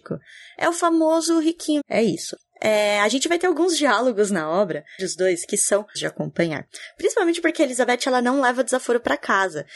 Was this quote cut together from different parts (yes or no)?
yes